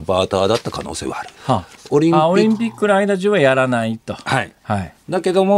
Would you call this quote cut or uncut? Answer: cut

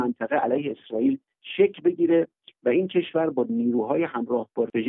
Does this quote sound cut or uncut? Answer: uncut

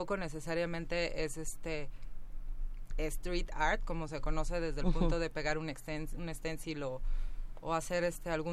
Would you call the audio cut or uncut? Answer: uncut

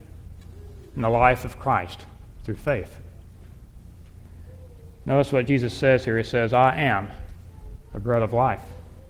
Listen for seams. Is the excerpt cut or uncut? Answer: uncut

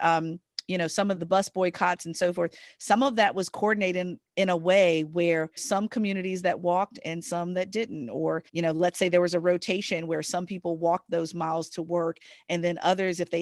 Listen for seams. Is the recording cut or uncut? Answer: cut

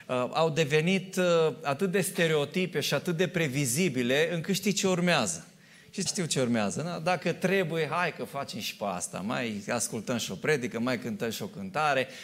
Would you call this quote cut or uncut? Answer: cut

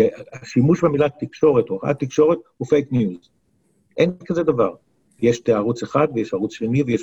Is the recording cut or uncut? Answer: uncut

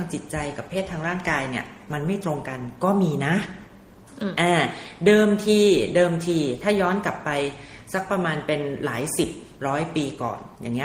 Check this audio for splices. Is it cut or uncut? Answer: cut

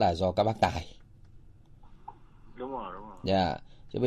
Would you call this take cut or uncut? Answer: uncut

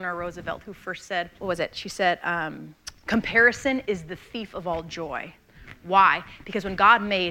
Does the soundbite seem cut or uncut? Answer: cut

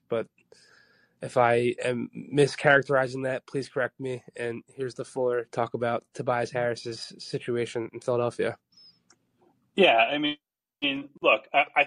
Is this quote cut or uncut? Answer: cut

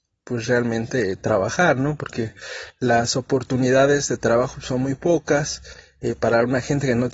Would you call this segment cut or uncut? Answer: uncut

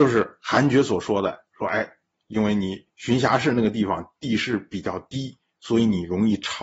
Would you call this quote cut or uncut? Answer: uncut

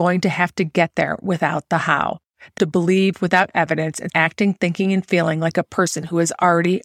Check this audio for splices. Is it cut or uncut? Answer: cut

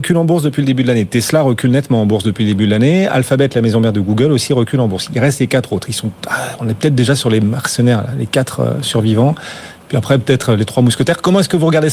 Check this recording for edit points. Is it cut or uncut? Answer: uncut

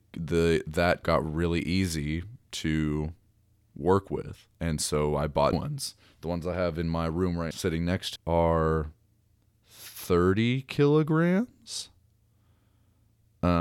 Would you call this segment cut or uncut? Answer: cut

